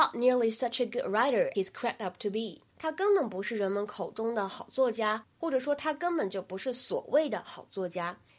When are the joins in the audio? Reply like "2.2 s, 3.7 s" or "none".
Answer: 1.5 s, 2.7 s